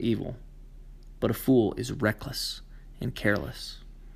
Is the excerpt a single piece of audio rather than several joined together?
yes; 0 cuts

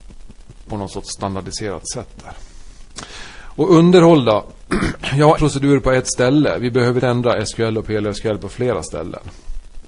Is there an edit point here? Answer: yes; 2 cuts; at 5.4 s, 7.0 s

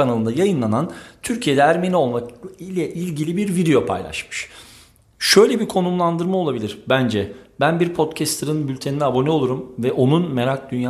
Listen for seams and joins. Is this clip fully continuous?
yes; 0 cuts

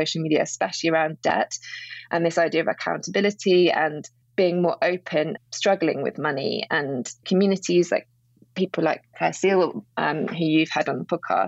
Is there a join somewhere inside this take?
yes; 2 cuts; at 5.4 s, 7.2 s

